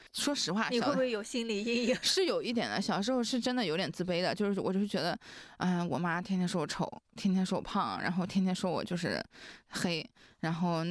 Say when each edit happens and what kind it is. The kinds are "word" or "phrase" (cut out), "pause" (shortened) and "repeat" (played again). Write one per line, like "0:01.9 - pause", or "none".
none